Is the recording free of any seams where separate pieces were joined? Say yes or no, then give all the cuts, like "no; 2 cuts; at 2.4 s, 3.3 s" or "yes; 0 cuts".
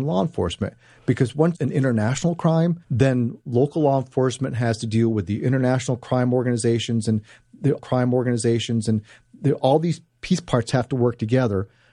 no; 3 cuts; at 1.5 s, 2.8 s, 7.8 s